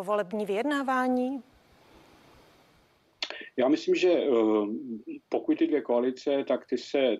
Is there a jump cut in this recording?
yes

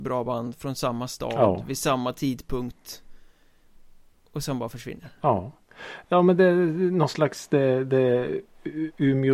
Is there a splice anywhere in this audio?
no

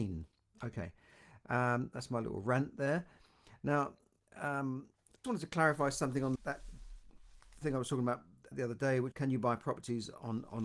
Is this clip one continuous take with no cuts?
no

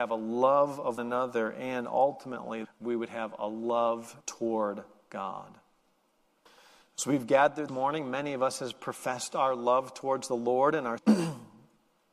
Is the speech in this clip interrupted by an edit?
yes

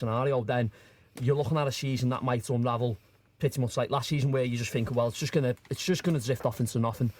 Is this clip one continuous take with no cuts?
yes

